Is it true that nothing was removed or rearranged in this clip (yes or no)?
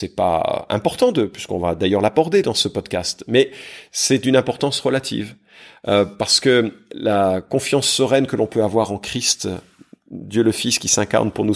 yes